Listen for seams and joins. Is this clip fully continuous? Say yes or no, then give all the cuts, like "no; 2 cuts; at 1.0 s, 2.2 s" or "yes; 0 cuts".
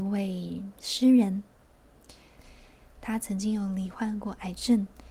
yes; 0 cuts